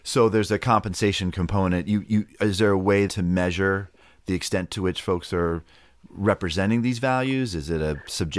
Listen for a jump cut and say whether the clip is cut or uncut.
cut